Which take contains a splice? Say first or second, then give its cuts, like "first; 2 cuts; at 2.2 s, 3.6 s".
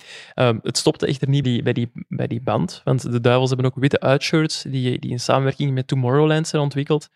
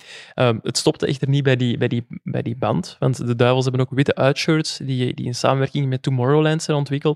first; 1 cut; at 1.4 s